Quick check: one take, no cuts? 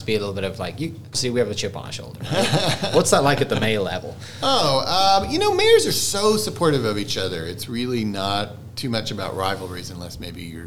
no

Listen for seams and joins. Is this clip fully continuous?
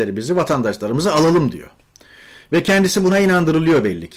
yes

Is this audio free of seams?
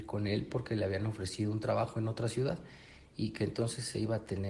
yes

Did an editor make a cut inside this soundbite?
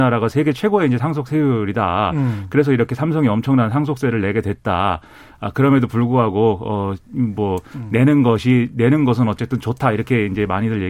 no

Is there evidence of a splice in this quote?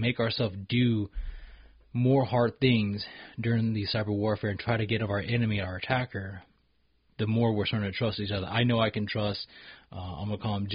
yes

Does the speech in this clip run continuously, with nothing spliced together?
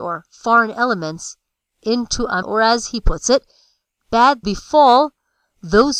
no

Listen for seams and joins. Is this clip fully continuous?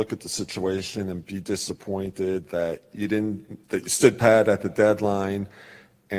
no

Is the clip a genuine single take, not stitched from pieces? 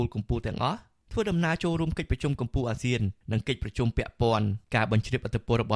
no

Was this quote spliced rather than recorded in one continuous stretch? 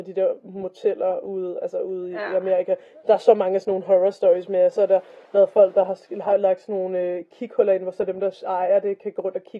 no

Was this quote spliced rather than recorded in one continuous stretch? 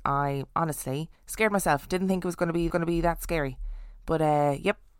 yes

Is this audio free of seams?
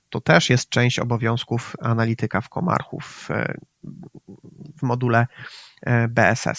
yes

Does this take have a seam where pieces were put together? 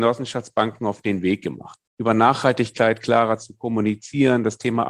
yes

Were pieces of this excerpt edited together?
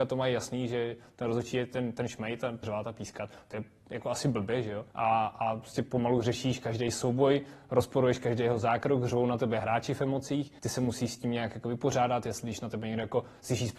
yes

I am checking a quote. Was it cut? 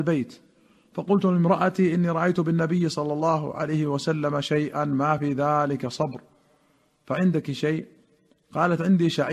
no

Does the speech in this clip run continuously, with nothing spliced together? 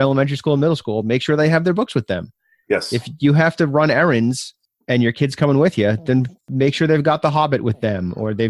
yes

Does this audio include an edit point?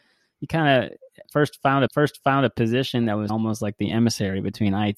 yes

